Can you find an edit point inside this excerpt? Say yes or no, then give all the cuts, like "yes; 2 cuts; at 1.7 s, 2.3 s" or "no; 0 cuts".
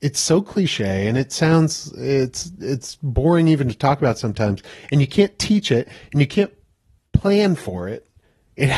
no; 0 cuts